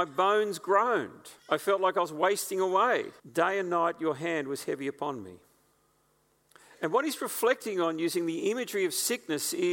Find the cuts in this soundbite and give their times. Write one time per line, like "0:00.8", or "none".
0:01.4
0:03.2